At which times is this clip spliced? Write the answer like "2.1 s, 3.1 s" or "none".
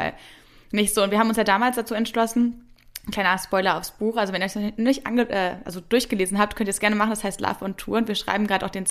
none